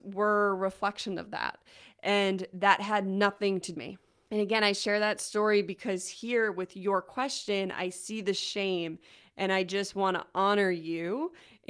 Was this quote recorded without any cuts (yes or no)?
no